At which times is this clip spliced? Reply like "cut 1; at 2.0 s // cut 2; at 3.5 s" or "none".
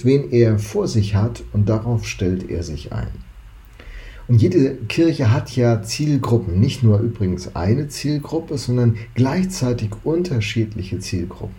none

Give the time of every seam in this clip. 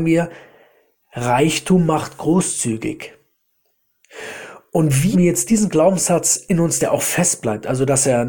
cut 1; at 5.1 s // cut 2; at 6.8 s

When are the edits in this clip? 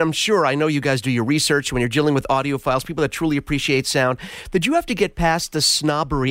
none

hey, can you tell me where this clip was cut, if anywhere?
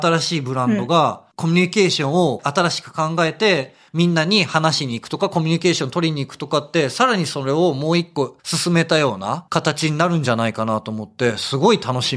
cut 1; at 1.3 s

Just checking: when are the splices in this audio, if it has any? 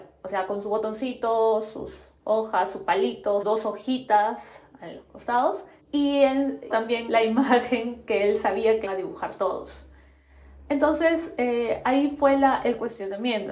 cut 1; at 2.2 s // cut 2; at 3.4 s // cut 3; at 5.8 s // cut 4; at 6.7 s // cut 5; at 7.1 s // cut 6; at 8.9 s

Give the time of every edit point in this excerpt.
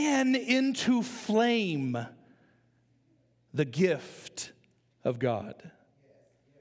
none

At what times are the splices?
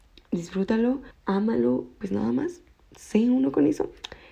cut 1; at 1.1 s // cut 2; at 2.0 s

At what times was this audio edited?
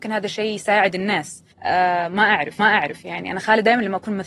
cut 1; at 1.5 s // cut 2; at 2.6 s

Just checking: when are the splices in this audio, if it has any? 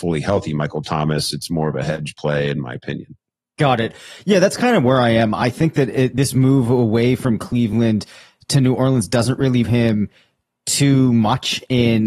cut 1; at 9.6 s

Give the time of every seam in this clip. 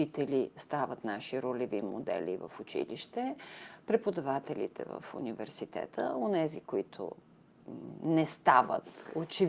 none

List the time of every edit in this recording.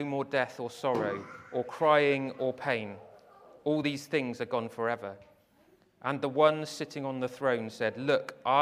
none

